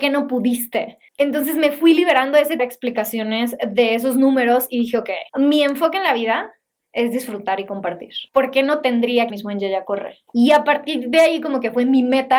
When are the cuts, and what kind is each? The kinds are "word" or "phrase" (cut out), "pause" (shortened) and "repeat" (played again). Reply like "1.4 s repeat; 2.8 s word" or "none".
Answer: 1.1 s pause; 2.6 s phrase; 5.3 s pause; 8.3 s pause; 9.3 s phrase; 10.3 s pause